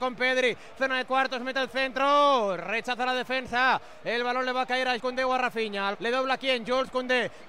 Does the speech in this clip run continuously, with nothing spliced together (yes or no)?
no